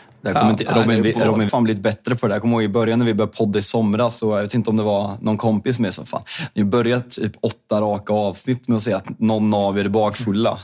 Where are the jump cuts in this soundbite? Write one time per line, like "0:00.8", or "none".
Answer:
0:01.5